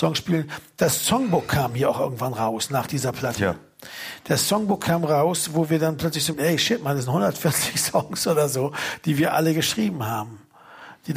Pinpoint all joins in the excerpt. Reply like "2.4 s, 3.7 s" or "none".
6.3 s